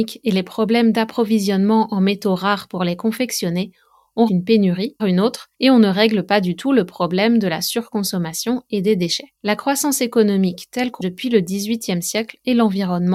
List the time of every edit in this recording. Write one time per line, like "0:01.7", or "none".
0:04.3
0:05.0
0:05.5
0:09.4
0:11.0